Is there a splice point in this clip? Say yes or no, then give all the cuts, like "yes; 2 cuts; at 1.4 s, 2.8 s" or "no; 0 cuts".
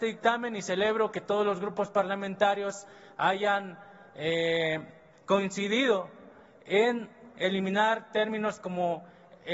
no; 0 cuts